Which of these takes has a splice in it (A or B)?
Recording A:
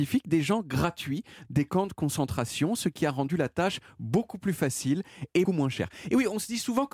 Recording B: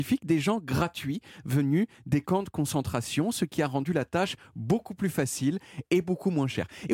A